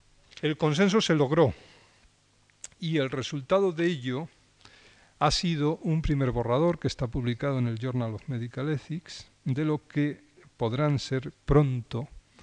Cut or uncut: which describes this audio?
uncut